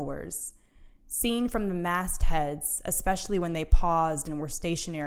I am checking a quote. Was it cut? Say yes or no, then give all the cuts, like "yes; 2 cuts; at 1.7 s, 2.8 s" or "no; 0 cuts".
no; 0 cuts